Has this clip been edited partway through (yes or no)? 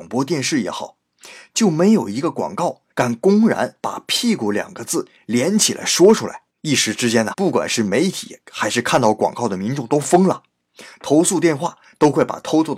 yes